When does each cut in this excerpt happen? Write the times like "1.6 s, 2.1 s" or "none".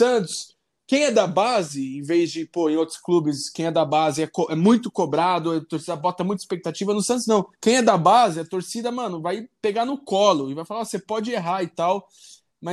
7.5 s